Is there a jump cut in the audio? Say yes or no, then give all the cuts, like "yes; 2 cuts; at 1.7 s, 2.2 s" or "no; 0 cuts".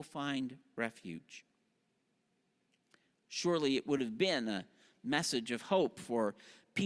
no; 0 cuts